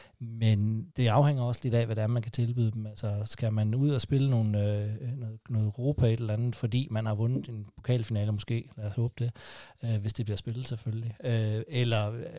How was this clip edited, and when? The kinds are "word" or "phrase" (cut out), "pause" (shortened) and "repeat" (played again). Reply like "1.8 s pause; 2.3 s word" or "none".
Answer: 0.9 s pause